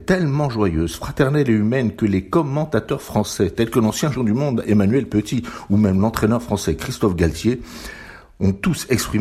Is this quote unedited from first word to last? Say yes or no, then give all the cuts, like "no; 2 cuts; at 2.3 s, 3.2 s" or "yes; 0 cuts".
no; 1 cut; at 4.1 s